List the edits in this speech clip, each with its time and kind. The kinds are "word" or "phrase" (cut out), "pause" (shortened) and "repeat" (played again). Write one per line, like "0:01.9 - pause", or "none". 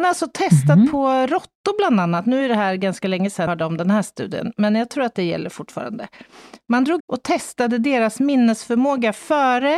0:03.5 - word
0:07.0 - phrase